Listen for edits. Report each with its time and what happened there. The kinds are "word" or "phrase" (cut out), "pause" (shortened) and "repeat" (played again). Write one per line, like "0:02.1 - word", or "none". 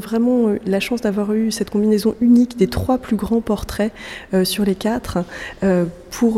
none